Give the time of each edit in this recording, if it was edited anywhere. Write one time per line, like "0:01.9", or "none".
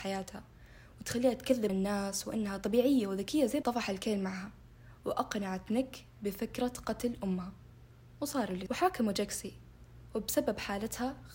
0:01.7
0:03.6
0:08.7